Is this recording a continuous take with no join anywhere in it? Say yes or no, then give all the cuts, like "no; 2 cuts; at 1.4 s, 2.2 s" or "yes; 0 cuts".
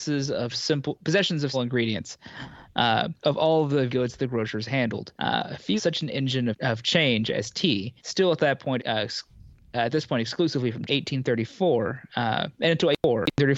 no; 9 cuts; at 1.5 s, 3.2 s, 3.9 s, 5.1 s, 5.8 s, 6.5 s, 8.0 s, 8.8 s, 10.9 s